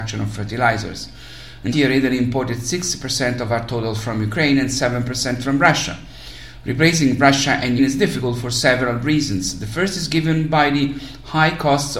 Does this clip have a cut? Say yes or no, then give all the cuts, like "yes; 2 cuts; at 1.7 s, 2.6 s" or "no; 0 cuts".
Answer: yes; 2 cuts; at 1.7 s, 7.8 s